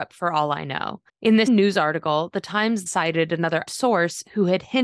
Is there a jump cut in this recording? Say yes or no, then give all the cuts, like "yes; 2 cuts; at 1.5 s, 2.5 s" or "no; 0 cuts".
yes; 4 cuts; at 1.1 s, 1.5 s, 2.9 s, 3.7 s